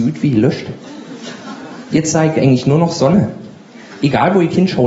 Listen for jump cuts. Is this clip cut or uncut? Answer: uncut